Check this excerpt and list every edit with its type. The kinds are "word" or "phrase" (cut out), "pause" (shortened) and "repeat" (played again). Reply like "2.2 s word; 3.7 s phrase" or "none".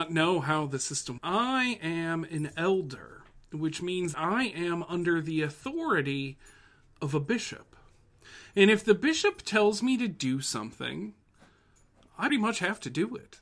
1.2 s word; 4.1 s word; 12.3 s word

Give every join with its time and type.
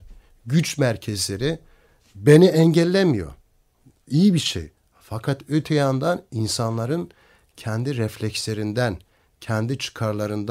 none

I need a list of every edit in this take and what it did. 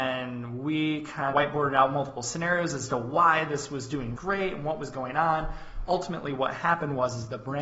1.3 s phrase; 4.1 s word; 5.9 s word

